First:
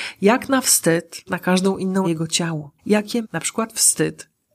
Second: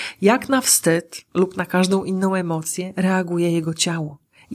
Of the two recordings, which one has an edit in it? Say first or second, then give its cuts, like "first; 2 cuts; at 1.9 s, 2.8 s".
first; 4 cuts; at 1.3 s, 2.0 s, 2.8 s, 3.2 s